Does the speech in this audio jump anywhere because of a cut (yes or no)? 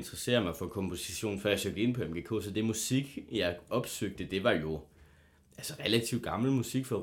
no